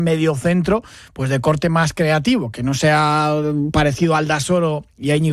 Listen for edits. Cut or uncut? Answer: uncut